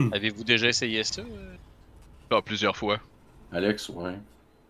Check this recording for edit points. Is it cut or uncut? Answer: uncut